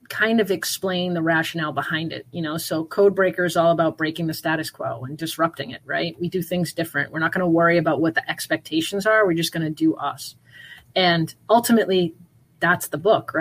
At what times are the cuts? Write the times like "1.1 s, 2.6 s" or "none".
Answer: none

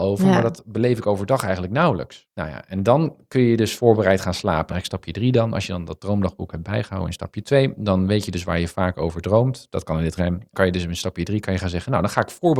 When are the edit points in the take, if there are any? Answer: 2.3 s, 4.7 s, 10.2 s, 10.5 s

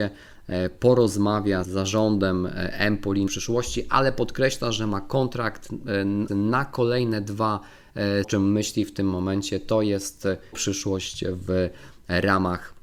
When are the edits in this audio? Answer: 1.6 s, 3.3 s, 6.3 s, 8.2 s, 10.5 s

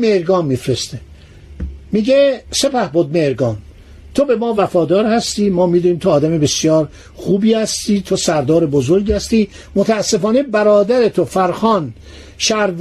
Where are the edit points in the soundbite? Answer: none

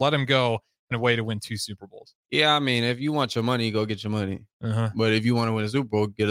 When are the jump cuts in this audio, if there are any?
0.9 s, 2.2 s

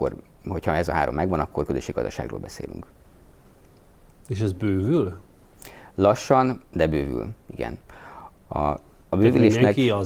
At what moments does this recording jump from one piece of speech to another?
none

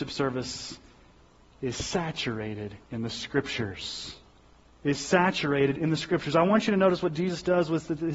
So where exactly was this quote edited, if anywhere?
2.8 s

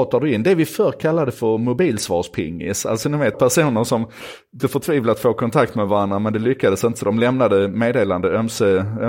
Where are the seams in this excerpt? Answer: 3.3 s, 4.6 s

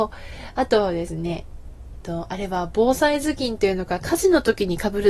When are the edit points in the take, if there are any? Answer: 1.9 s

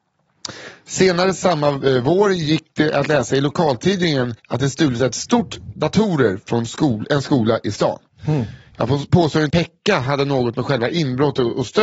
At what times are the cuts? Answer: 4.4 s, 5.7 s, 9.5 s

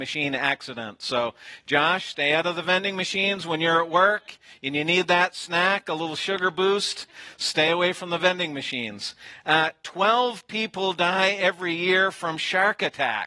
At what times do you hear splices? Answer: none

